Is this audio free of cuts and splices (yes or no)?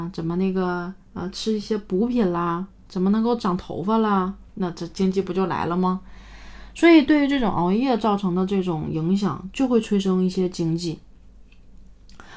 no